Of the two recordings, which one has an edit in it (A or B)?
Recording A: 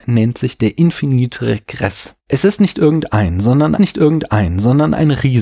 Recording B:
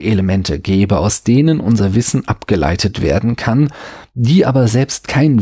A